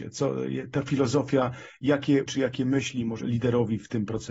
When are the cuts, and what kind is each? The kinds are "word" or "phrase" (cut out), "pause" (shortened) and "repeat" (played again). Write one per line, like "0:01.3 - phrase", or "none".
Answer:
0:02.3 - word
0:03.2 - word

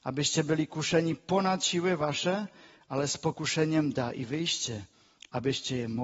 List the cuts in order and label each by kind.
none

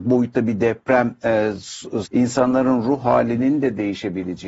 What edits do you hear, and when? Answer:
0:02.1 - word

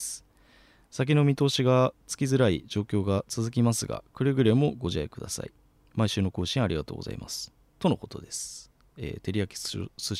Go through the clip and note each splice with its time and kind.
none

